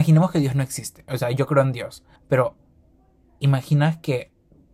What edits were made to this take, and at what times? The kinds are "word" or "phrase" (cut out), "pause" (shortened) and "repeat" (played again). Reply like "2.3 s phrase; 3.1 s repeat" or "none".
2.2 s pause